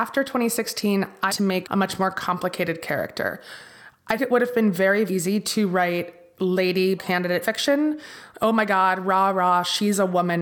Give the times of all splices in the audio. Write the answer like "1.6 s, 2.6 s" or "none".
1.3 s, 1.6 s, 4.2 s, 5.1 s, 7.0 s, 7.4 s